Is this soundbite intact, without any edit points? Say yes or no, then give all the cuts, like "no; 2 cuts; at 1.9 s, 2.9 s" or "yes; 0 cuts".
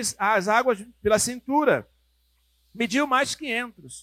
yes; 0 cuts